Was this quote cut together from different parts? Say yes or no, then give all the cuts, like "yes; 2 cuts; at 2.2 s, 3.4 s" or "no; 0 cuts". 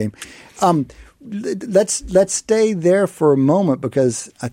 no; 0 cuts